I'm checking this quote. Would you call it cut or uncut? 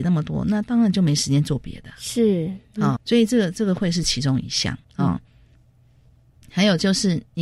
cut